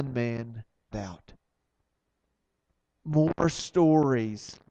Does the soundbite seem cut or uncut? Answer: cut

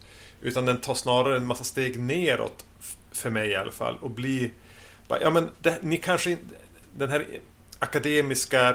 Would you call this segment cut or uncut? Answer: uncut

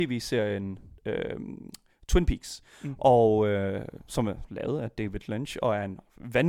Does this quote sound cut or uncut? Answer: cut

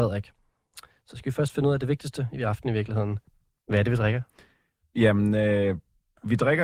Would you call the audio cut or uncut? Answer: cut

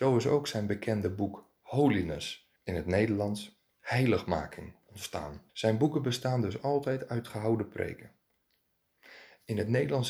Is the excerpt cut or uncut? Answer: cut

